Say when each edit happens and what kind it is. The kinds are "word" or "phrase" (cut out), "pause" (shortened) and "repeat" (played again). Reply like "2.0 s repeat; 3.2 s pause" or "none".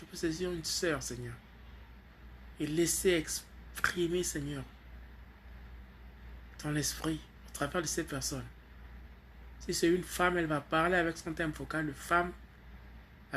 none